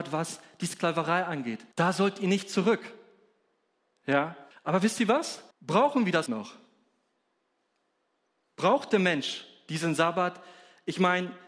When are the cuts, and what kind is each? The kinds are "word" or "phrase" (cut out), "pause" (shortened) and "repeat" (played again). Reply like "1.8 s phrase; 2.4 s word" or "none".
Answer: 1.7 s pause; 4.5 s pause; 5.5 s pause; 6.3 s word